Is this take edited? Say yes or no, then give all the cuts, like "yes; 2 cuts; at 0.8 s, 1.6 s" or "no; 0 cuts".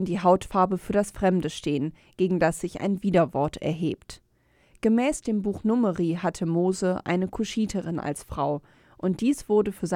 no; 0 cuts